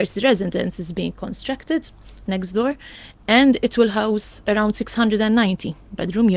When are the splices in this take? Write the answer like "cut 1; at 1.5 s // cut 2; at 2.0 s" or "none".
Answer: cut 1; at 2.2 s